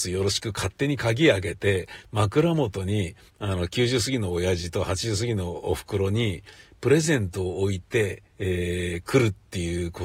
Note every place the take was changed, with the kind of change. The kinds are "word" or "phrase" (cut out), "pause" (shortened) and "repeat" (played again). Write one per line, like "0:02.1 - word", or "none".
0:03.3 - pause
0:08.3 - pause